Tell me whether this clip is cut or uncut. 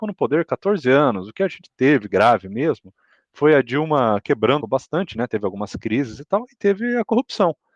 cut